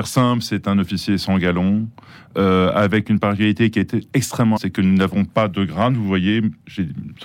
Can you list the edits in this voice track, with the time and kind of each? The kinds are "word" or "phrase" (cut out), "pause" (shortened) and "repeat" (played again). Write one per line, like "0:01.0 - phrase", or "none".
0:04.6 - word